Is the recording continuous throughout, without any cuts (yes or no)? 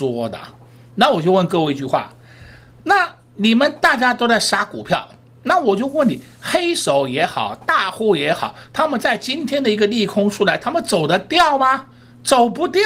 yes